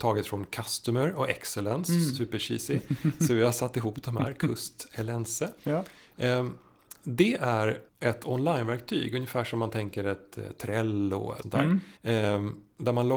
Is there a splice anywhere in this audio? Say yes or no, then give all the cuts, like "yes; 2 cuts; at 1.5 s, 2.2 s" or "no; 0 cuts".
yes; 3 cuts; at 7.9 s, 11.4 s, 12.0 s